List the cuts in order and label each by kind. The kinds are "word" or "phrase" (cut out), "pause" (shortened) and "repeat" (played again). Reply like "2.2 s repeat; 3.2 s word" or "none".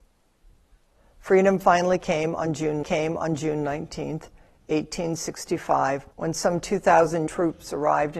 2.8 s repeat; 6.1 s pause; 7.3 s word

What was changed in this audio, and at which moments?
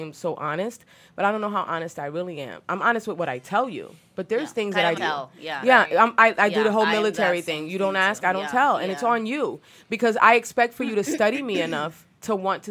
5.0 s phrase

